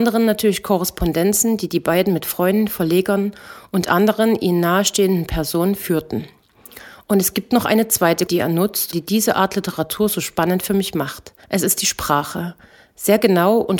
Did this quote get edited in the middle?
yes; 3 cuts; at 8.3 s, 8.9 s, 11.4 s

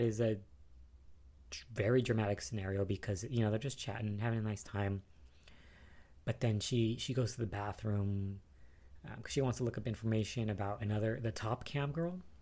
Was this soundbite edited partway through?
no; 0 cuts

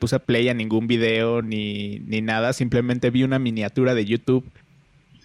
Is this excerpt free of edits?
yes; 0 cuts

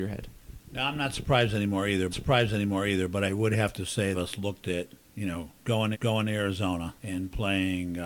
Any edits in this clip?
yes; 5 cuts; at 2.1 s, 4.1 s, 5.0 s, 5.9 s, 7.0 s

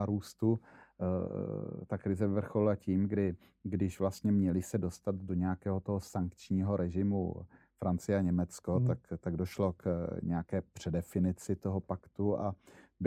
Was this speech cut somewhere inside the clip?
no; 0 cuts

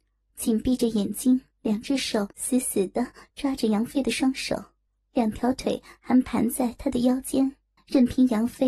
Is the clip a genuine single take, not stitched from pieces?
no; 4 cuts; at 1.5 s, 2.3 s, 4.9 s, 7.8 s

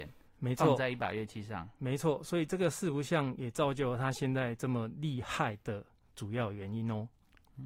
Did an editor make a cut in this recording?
no; 0 cuts

